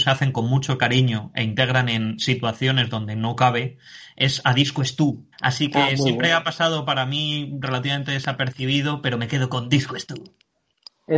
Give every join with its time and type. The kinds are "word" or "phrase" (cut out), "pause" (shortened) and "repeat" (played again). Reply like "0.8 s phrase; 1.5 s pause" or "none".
5.3 s pause